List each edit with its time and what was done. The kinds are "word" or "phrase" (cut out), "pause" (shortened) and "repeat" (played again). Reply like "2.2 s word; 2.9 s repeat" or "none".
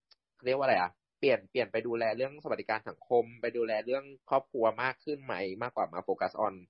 4.2 s pause